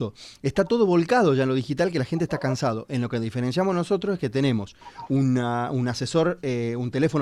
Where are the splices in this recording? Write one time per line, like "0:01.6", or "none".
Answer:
none